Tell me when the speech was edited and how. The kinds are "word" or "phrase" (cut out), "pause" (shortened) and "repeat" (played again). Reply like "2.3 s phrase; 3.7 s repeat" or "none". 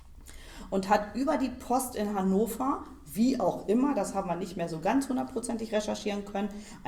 none

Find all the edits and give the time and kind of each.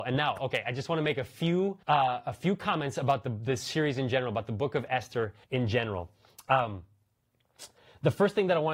1.8 s pause; 5.4 s pause

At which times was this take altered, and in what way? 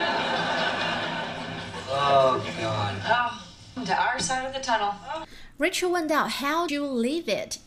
3.8 s word; 6.7 s word

